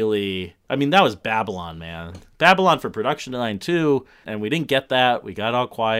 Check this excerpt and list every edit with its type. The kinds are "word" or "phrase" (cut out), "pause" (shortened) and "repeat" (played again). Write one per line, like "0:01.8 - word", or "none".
0:04.2 - word